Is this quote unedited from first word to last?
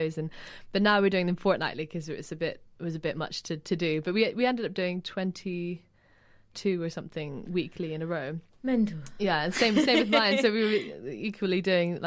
yes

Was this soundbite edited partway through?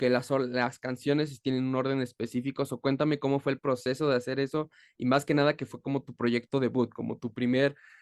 no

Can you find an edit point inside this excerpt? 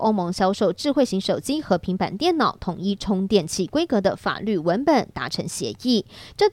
no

